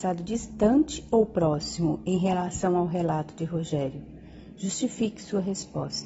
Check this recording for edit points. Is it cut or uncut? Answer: uncut